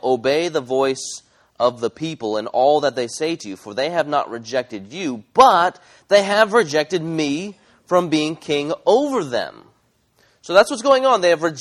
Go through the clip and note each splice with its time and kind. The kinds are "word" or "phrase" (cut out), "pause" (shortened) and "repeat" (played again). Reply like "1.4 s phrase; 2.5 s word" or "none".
none